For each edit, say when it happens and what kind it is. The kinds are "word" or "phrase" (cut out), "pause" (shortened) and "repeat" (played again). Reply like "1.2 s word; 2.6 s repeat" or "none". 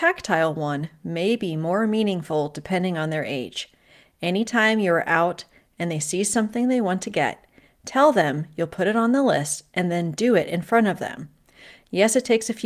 none